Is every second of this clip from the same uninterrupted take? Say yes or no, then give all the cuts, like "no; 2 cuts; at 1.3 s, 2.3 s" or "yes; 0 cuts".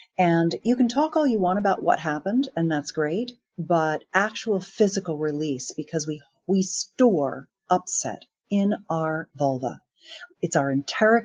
yes; 0 cuts